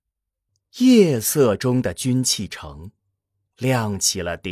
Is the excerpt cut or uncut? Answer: uncut